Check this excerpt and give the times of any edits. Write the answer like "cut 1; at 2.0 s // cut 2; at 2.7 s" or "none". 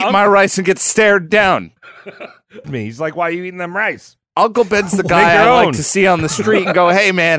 cut 1; at 1.8 s // cut 2; at 2.6 s